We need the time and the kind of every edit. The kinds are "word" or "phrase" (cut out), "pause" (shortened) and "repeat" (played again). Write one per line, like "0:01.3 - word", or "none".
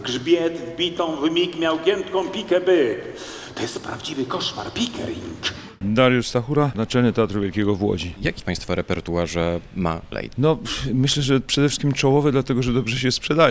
0:06.7 - word
0:08.4 - word
0:10.1 - phrase